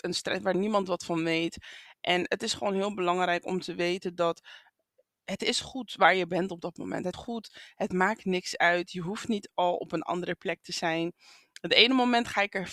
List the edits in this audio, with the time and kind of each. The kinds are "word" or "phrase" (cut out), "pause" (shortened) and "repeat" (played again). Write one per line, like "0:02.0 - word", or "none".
0:07.1 - word